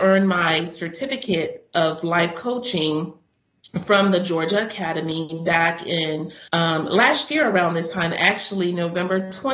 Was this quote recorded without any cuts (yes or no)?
no